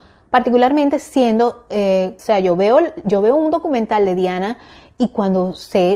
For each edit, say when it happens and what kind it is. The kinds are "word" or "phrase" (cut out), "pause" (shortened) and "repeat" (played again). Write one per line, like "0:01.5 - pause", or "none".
0:02.2 - phrase